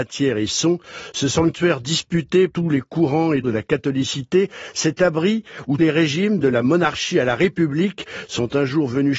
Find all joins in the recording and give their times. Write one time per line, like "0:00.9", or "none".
0:02.5
0:03.4
0:05.8